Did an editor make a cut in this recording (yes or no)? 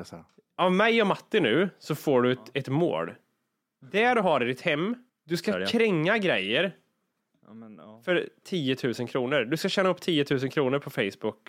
yes